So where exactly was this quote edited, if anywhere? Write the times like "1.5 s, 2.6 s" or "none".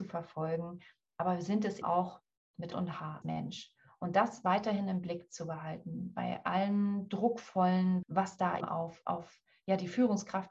1.8 s, 2.7 s, 3.2 s, 8.0 s, 8.6 s